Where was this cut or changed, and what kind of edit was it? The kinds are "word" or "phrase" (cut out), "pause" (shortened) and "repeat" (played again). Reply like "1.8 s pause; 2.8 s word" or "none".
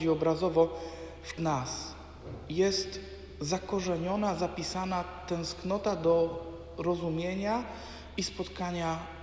1.4 s phrase